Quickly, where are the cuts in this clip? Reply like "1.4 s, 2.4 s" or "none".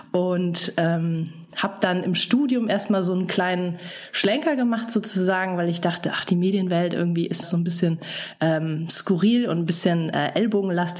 7.4 s